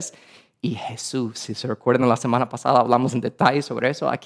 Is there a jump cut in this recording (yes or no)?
no